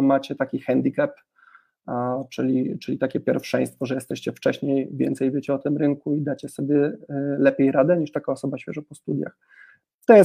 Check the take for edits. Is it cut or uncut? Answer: uncut